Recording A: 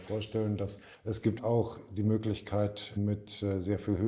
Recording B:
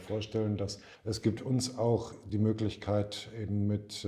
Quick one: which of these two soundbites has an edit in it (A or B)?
A